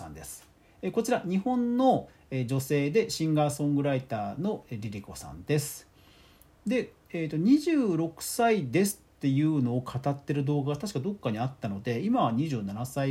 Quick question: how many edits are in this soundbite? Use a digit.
0